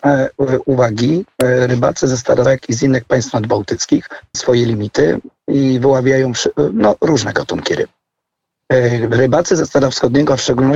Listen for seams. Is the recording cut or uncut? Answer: cut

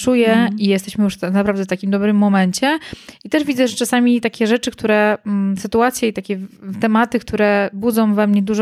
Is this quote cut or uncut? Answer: uncut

